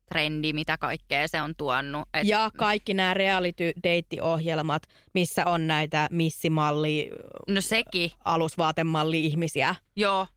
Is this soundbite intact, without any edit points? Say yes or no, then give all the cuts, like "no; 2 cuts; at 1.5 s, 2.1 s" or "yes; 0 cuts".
yes; 0 cuts